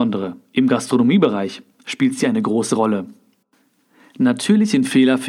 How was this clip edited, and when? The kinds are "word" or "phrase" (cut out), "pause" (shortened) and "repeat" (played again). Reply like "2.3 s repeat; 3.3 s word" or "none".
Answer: none